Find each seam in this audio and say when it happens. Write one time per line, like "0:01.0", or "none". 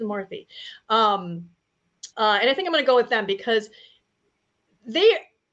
0:02.1

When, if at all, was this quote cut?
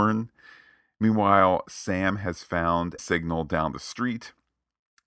0:03.0

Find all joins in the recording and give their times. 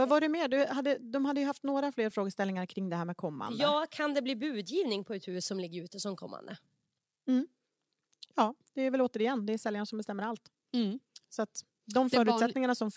none

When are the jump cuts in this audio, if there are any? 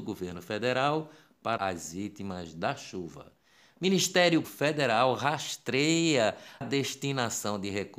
0:01.6
0:04.4
0:06.6

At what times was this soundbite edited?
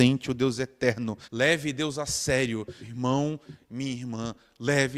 0:01.2
0:02.8

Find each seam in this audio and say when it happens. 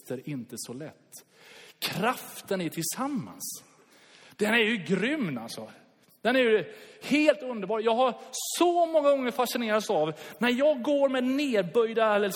none

